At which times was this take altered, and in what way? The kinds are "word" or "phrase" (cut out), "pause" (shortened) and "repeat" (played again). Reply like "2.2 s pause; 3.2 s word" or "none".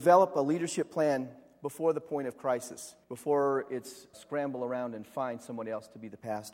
3.0 s pause; 4.1 s word